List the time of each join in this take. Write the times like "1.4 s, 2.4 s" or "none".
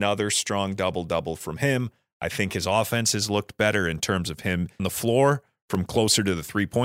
4.8 s